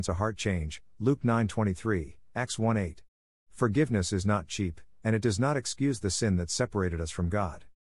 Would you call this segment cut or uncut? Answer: uncut